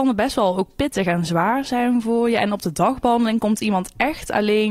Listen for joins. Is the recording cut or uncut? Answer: uncut